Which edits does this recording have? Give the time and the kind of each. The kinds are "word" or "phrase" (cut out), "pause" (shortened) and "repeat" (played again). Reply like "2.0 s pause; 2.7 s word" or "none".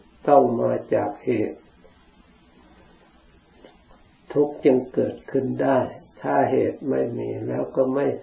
none